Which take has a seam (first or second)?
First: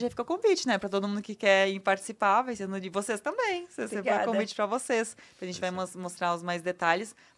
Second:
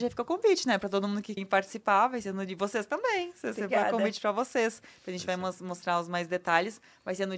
second